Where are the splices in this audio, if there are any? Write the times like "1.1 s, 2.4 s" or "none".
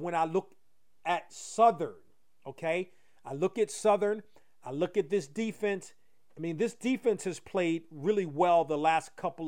none